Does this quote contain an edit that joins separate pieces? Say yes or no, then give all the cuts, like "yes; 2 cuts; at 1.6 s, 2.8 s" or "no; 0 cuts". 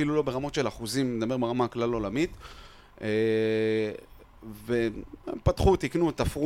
no; 0 cuts